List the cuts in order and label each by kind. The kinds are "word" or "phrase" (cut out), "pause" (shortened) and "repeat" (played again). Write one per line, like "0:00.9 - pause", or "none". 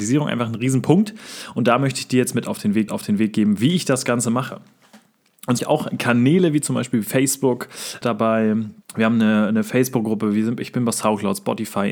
0:02.9 - repeat
0:05.6 - phrase
0:08.0 - phrase
0:08.8 - pause